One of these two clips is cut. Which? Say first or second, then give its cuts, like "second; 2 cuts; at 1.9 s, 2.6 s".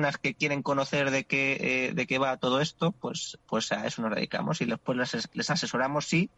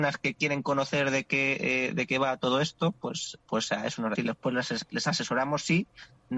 second; 1 cut; at 4.1 s